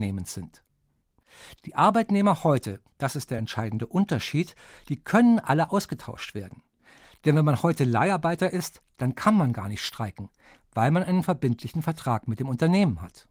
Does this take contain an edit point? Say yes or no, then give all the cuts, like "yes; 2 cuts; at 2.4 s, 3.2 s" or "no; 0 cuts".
no; 0 cuts